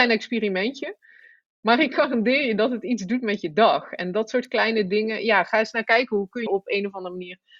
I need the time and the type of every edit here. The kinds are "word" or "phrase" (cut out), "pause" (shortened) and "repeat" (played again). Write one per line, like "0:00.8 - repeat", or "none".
0:06.5 - word